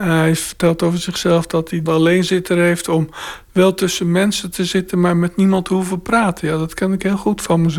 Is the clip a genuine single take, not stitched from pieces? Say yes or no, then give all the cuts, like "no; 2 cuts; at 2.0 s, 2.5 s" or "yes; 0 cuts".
no; 1 cut; at 1.9 s